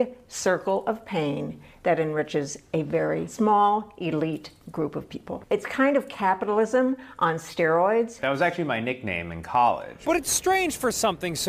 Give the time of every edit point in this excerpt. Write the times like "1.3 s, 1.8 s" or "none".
none